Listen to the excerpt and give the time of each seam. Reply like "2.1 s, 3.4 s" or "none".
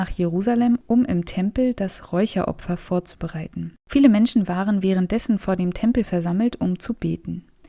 3.8 s